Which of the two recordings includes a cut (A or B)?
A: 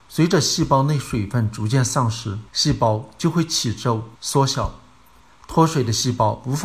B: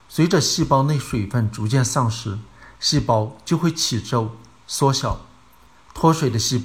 A